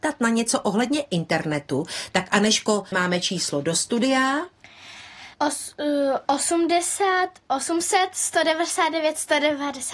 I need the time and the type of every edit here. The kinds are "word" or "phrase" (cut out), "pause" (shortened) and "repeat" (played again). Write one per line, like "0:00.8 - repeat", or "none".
0:02.9 - word
0:05.3 - pause
0:07.5 - pause